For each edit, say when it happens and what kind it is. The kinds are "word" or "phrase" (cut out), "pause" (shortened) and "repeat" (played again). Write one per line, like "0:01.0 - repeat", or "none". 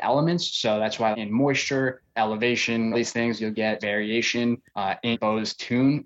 0:01.1 - word
0:02.1 - word
0:02.9 - word
0:03.8 - word
0:04.7 - pause
0:05.1 - word